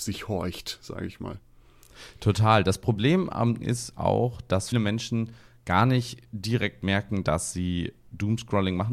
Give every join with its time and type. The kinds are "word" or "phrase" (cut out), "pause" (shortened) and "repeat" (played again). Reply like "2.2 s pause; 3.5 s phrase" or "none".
3.6 s phrase; 4.7 s word